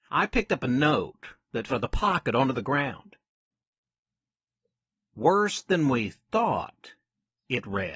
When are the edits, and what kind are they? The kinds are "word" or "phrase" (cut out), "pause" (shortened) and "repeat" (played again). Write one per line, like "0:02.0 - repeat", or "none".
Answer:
0:01.7 - phrase